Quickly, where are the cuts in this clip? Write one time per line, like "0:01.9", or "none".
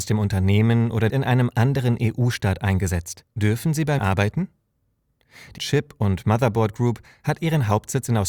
0:01.1
0:03.3
0:04.0
0:05.6